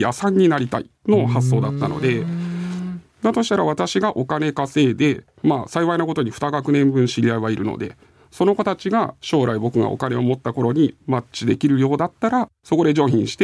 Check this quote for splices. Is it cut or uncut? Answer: uncut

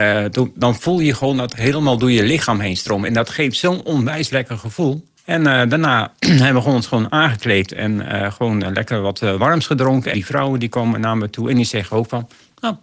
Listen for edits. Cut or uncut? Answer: cut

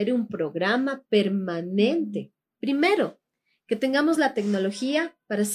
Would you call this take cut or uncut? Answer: uncut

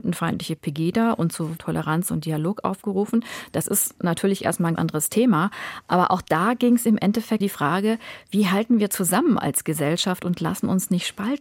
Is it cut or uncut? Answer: cut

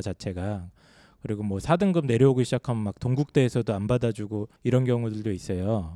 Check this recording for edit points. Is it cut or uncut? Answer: cut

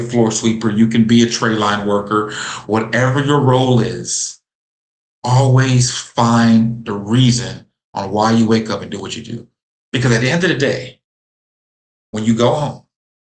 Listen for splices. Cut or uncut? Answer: uncut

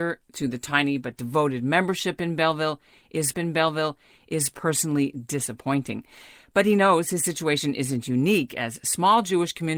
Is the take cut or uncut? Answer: cut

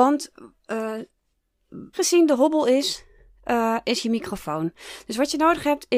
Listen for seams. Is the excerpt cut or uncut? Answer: cut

